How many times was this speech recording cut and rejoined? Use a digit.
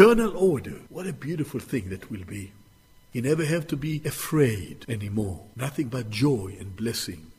0